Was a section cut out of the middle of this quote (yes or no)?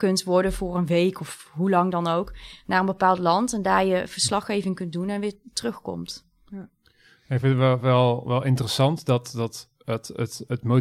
no